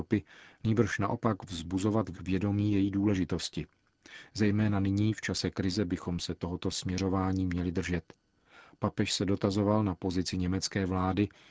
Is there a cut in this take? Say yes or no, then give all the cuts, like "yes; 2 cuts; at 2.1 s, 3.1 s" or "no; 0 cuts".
yes; 1 cut; at 2.1 s